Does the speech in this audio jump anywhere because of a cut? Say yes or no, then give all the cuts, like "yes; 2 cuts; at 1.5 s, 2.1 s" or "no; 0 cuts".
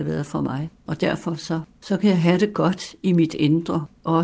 no; 0 cuts